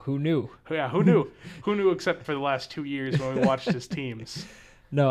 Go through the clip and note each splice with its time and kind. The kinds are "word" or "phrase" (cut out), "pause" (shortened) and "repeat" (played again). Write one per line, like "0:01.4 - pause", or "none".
0:02.2 - word

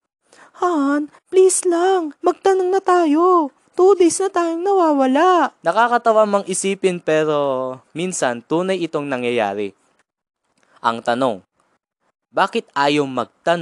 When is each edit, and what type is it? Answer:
0:02.1 - pause
0:03.7 - pause
0:05.6 - pause

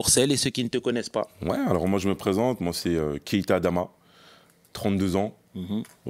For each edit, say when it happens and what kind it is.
none

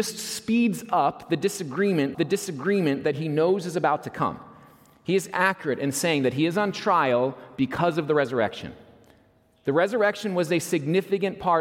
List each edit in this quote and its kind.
0:02.1 - repeat

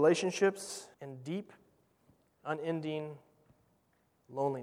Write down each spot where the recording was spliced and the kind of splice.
0:00.9 - pause

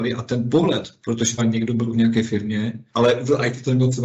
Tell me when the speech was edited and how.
0:01.4 - word
0:01.9 - word
0:02.9 - pause

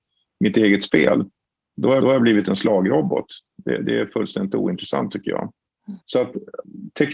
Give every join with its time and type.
0:02.0 - repeat
0:06.0 - pause

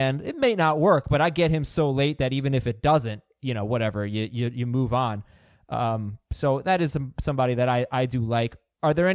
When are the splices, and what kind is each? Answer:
none

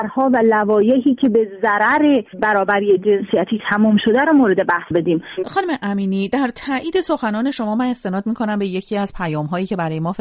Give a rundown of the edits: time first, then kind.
0:04.9 - word

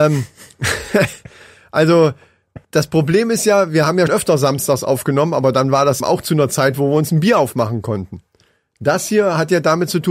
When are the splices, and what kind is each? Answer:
0:02.6 - pause
0:04.1 - word
0:06.0 - word

